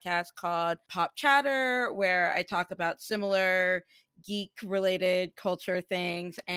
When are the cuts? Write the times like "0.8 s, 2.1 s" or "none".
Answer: none